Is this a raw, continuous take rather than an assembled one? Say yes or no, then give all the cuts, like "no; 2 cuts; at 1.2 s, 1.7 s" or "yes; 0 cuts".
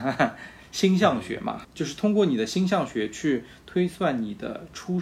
no; 1 cut; at 1.6 s